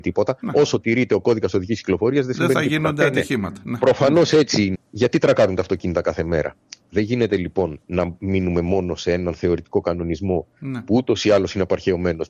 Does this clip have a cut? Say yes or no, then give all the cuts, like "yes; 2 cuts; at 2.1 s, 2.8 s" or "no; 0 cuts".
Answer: yes; 2 cuts; at 4.7 s, 7.8 s